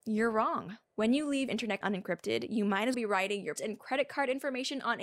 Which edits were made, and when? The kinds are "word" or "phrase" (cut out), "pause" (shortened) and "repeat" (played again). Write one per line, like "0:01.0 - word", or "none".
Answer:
0:01.5 - word
0:01.8 - word
0:02.9 - word
0:03.6 - word